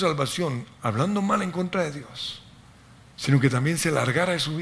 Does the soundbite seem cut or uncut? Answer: uncut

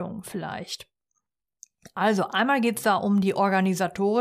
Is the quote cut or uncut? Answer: uncut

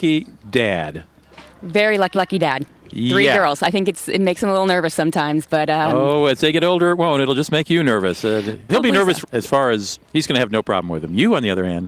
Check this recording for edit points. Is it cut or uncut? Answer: cut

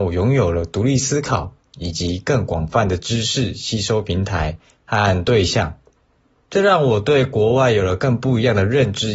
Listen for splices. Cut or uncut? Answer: uncut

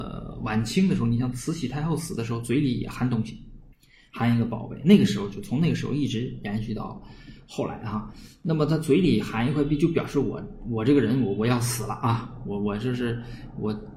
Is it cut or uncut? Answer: cut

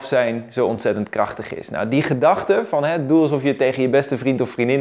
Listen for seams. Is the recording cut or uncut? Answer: uncut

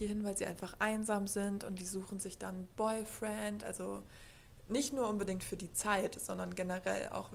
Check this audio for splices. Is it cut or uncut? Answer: uncut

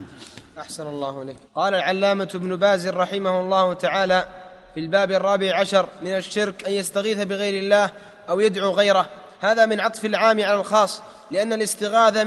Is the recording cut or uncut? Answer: cut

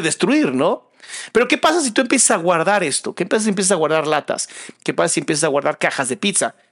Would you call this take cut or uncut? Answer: uncut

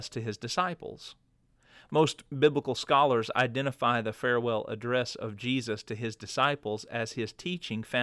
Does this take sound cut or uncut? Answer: uncut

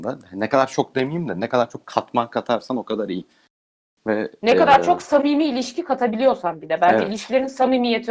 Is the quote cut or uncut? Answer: uncut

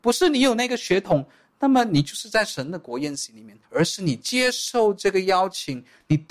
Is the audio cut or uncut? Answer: cut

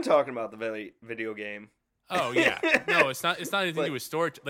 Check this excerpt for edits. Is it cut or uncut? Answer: uncut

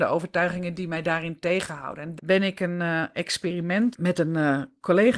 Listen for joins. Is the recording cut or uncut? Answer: cut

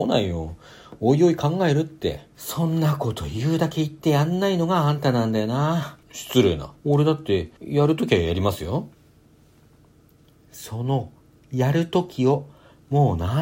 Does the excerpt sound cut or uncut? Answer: cut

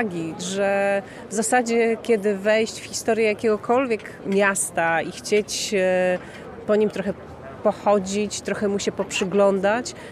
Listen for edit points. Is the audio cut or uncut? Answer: uncut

